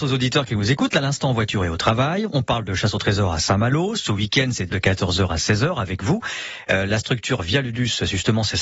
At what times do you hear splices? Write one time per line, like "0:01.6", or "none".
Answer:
0:04.7